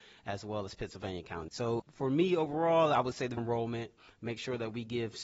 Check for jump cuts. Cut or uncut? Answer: cut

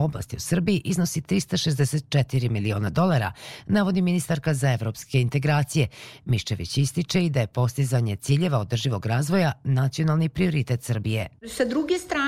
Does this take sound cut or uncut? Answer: uncut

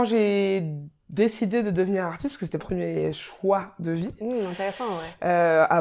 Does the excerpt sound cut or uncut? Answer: cut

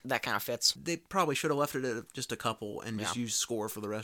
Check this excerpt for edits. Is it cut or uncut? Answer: uncut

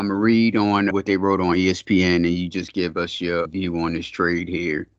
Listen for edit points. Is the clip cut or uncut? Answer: cut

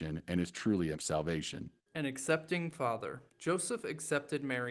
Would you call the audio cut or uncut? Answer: cut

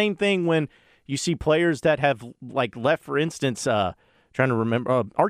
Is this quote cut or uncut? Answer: uncut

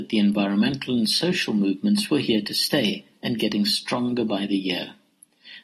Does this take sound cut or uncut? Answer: uncut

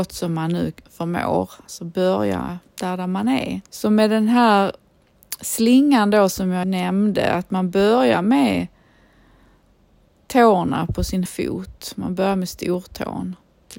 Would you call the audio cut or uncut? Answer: cut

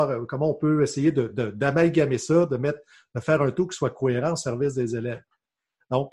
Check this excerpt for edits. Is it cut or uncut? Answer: uncut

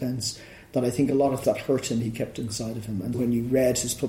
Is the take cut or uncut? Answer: cut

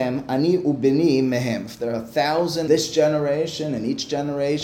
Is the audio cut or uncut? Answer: cut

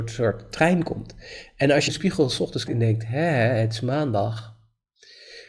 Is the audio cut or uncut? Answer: cut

